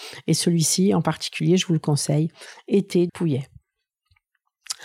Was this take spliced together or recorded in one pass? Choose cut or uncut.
cut